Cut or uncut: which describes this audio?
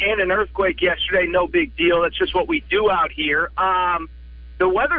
uncut